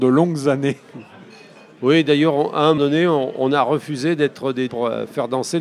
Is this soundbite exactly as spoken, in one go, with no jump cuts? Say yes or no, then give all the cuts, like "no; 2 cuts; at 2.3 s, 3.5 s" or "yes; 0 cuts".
no; 2 cuts; at 2.8 s, 4.7 s